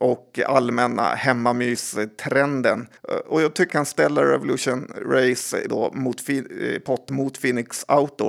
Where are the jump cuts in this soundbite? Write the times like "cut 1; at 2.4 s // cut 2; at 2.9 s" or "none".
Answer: cut 1; at 3.0 s // cut 2; at 3.7 s // cut 3; at 5.7 s // cut 4; at 7.1 s